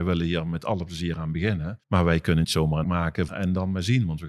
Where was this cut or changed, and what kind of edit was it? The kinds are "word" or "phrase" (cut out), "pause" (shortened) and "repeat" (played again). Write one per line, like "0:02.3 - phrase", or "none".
0:01.8 - pause
0:02.4 - word
0:02.8 - word
0:03.3 - phrase

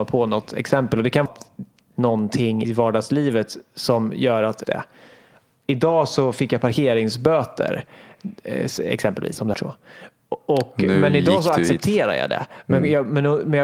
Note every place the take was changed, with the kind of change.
0:01.3 - word
0:01.9 - word
0:02.6 - word
0:04.6 - word
0:09.5 - phrase

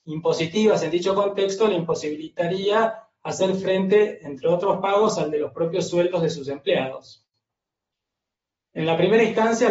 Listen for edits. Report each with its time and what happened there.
none

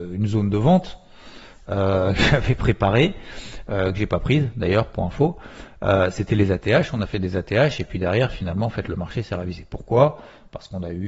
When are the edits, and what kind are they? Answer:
none

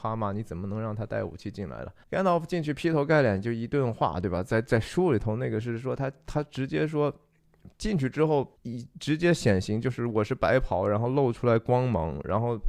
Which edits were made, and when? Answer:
0:02.0 - pause
0:07.7 - pause
0:08.6 - pause

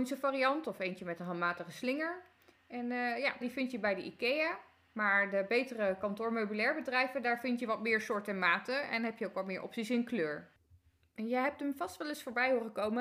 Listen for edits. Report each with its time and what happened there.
0:03.4 - phrase

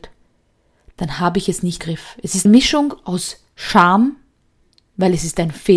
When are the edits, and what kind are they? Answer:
0:01.8 - word
0:02.5 - phrase

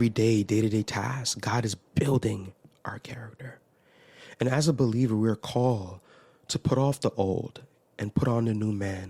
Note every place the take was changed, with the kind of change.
none

